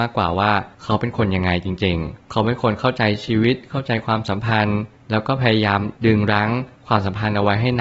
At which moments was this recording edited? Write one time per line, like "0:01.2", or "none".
0:06.0